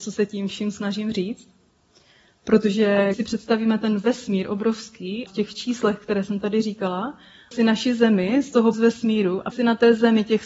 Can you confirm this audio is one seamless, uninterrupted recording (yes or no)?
no